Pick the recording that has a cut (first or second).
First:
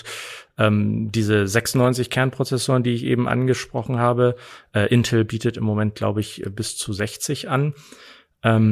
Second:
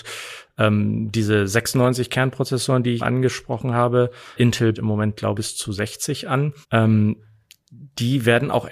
second